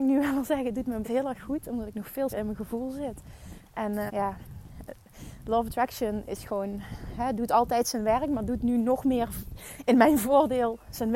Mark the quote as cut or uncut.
cut